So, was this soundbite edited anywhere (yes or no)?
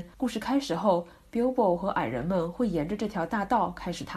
no